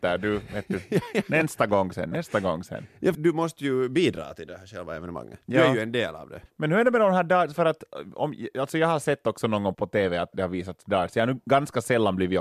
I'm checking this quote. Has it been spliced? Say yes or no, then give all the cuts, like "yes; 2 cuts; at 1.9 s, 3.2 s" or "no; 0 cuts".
yes; 4 cuts; at 3.1 s, 6.5 s, 9.7 s, 10.3 s